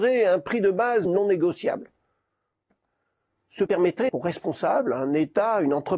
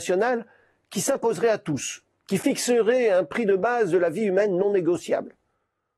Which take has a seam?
first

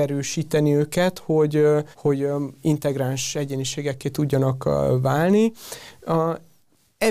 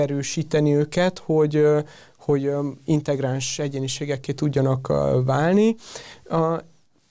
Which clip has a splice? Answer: first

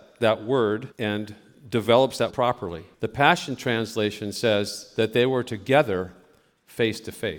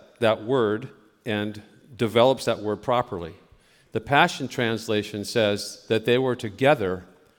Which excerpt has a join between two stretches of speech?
first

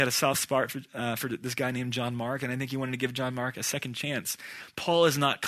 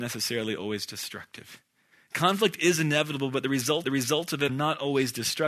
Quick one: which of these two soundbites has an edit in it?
second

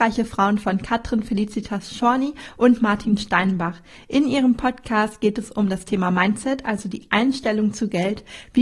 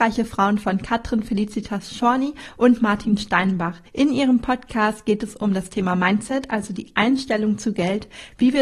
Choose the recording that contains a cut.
second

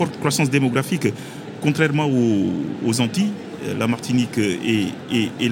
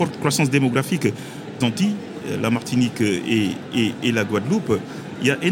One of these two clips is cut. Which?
second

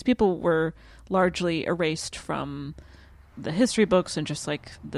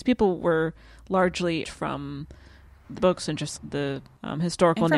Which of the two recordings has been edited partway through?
second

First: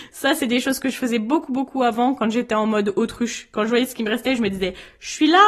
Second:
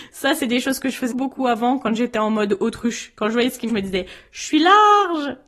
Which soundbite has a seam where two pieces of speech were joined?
second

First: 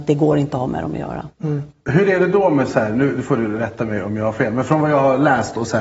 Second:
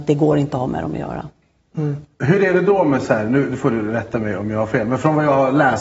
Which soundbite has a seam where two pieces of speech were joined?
first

